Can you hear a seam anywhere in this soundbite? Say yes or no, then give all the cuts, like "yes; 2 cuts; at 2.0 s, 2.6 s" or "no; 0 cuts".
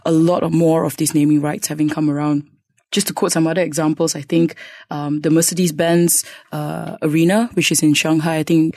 no; 0 cuts